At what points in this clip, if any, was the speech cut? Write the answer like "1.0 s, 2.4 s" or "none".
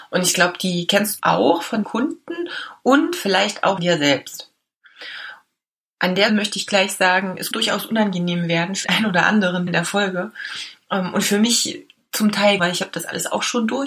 1.2 s, 1.8 s, 3.8 s, 6.3 s, 7.5 s, 8.8 s, 9.7 s, 12.6 s